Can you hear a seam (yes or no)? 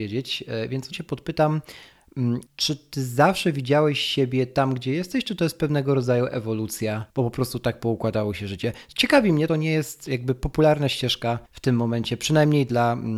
yes